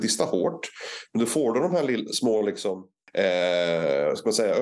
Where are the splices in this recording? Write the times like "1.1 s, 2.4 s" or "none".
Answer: none